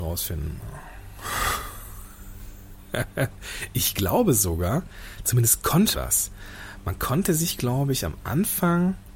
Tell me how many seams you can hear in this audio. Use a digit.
1